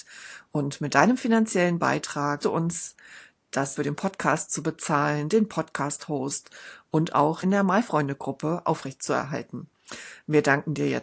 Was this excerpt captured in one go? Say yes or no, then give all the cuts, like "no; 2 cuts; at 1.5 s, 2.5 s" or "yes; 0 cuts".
no; 3 cuts; at 2.4 s, 3.8 s, 7.4 s